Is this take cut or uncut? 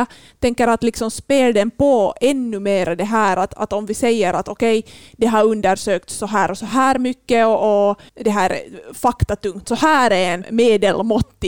cut